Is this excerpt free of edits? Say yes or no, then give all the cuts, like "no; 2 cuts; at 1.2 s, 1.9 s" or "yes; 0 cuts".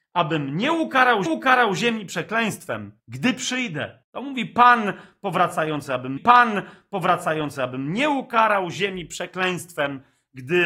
no; 4 cuts; at 1.3 s, 3.0 s, 4.0 s, 6.2 s